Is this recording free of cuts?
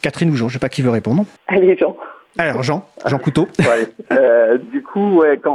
no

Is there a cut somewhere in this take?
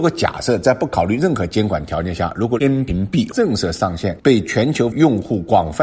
yes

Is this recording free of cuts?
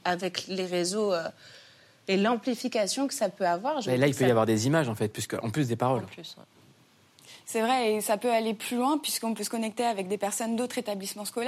yes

